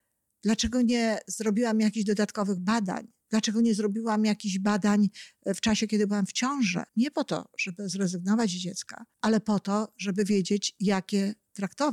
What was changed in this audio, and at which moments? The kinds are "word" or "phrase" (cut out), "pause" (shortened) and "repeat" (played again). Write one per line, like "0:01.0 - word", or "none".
0:06.9 - pause
0:09.1 - pause